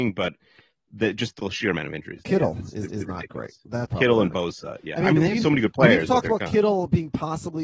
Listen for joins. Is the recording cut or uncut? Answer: cut